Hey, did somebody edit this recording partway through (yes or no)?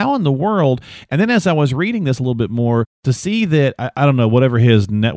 no